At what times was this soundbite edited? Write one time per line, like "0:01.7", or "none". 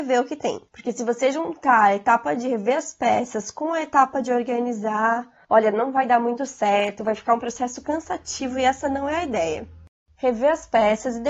none

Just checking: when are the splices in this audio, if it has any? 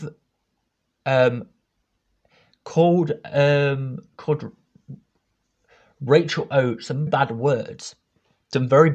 0:07.1

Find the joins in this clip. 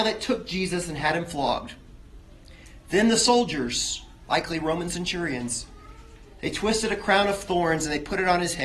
none

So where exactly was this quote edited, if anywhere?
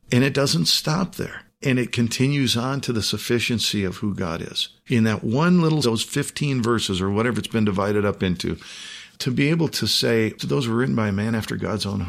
0:05.8
0:10.4

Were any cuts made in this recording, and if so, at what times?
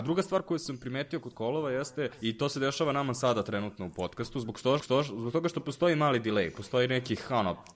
0:01.3
0:02.1
0:04.8

